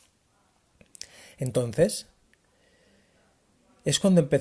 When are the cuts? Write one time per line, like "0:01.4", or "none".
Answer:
none